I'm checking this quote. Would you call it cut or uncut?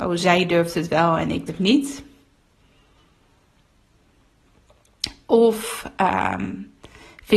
cut